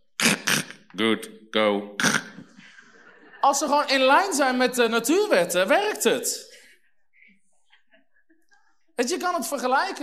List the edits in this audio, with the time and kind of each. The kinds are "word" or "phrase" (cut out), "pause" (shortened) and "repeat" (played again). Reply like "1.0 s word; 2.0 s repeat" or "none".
none